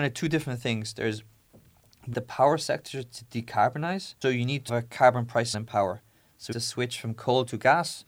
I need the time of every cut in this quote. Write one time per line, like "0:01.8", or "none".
0:02.1
0:04.2
0:04.7
0:05.5
0:06.5